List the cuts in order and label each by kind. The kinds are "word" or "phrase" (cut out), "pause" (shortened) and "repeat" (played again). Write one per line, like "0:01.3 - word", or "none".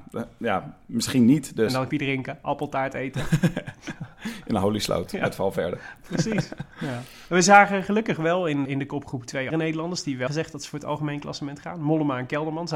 0:01.9 - word
0:06.7 - pause
0:08.6 - word
0:09.5 - word
0:10.3 - word